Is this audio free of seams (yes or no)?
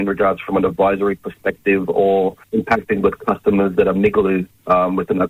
no